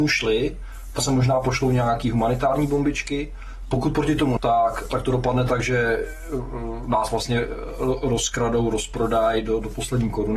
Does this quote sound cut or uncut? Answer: cut